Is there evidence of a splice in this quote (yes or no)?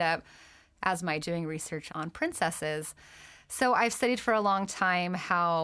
yes